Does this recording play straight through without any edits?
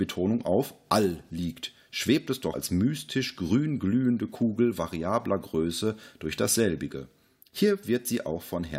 no; 1 cut; at 2.5 s

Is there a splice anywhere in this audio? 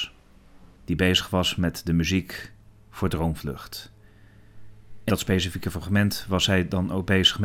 yes; 1 cut; at 5.1 s

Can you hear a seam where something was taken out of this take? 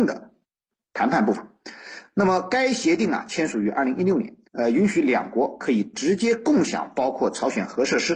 yes; 1 cut; at 4.4 s

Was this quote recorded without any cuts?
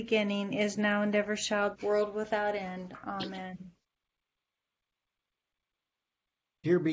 no; 1 cut; at 1.7 s

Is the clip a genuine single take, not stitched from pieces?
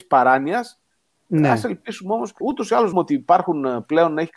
no; 2 cuts; at 2.4 s, 2.9 s

